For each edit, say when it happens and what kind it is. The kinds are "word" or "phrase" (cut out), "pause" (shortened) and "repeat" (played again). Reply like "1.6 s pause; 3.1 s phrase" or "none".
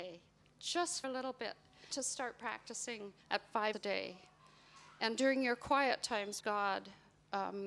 1.0 s word; 1.9 s word; 3.2 s pause; 3.7 s word; 6.4 s word